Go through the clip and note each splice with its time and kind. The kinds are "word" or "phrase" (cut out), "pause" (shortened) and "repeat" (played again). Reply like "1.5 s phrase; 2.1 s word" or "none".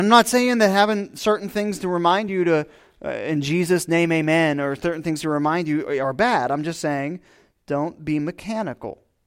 none

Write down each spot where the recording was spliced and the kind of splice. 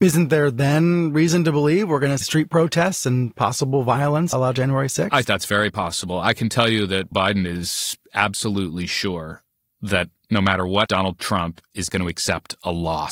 2.2 s word; 4.3 s word; 5.2 s word; 7.1 s word; 10.9 s word; 11.9 s word

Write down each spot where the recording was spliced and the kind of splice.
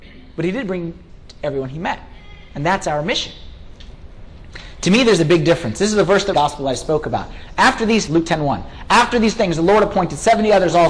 1.1 s word; 6.3 s phrase; 8.1 s word

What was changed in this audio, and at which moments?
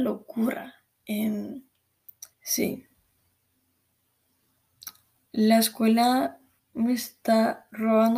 2.3 s pause; 6.6 s pause

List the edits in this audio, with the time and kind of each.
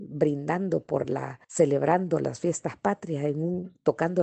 1.4 s pause

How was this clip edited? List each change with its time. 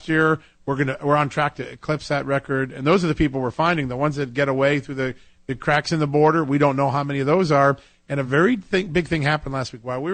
none

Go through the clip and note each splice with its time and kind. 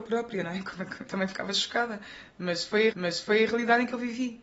1.0 s word; 2.9 s repeat

